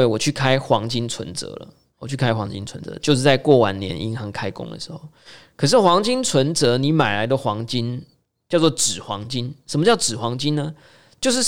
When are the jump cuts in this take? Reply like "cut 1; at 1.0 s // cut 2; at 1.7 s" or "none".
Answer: none